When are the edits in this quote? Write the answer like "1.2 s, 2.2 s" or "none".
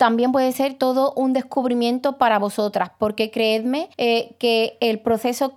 3.9 s